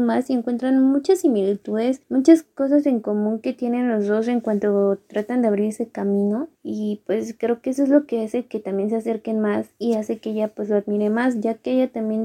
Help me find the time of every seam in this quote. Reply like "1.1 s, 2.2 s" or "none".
2.0 s, 6.5 s